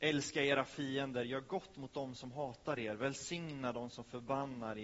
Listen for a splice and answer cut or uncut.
uncut